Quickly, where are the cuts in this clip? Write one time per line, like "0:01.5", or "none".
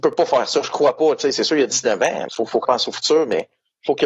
0:02.3
0:02.6